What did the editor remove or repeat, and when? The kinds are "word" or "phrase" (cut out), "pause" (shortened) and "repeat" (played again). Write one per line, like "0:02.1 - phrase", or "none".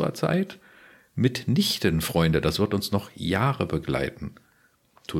none